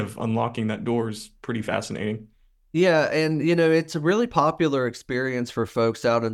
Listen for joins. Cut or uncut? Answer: uncut